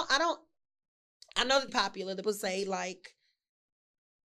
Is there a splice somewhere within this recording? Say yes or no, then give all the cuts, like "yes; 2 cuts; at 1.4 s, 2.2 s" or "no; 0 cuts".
yes; 2 cuts; at 1.7 s, 2.2 s